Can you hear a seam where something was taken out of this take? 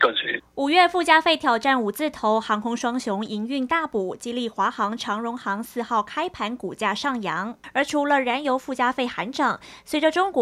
no; 0 cuts

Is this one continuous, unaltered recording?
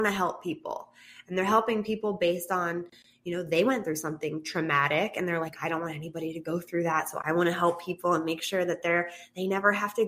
yes; 0 cuts

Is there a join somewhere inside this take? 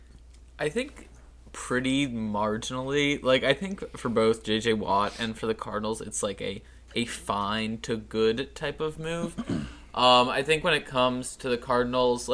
no; 0 cuts

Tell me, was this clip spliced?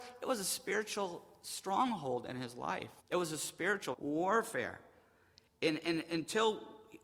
yes; 2 cuts; at 3.0 s, 3.9 s

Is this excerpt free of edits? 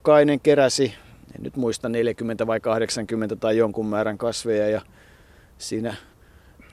yes; 0 cuts

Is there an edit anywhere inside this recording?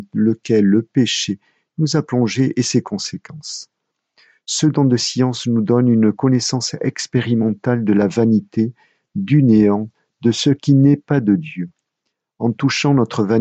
no; 0 cuts

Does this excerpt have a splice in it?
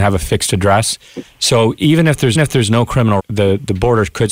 yes; 2 cuts; at 2.3 s, 3.2 s

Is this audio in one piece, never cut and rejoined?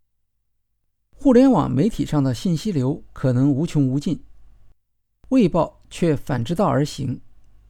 yes; 0 cuts

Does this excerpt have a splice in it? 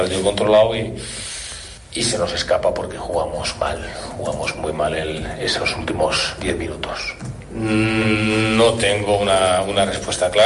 no; 0 cuts

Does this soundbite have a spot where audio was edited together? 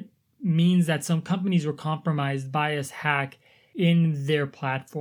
no; 0 cuts

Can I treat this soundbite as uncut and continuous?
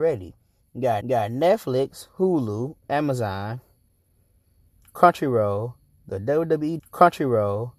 no; 2 cuts; at 1.0 s, 6.8 s

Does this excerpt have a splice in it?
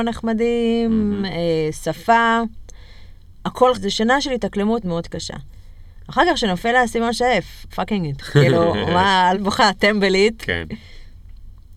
yes; 5 cuts; at 3.7 s, 4.8 s, 7.7 s, 8.2 s, 9.3 s

